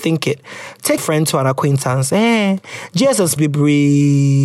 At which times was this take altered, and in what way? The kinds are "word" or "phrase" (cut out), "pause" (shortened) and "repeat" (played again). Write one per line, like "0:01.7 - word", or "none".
0:01.0 - phrase
0:03.4 - word